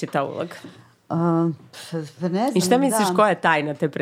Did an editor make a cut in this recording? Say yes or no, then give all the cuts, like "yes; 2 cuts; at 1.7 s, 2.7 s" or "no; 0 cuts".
no; 0 cuts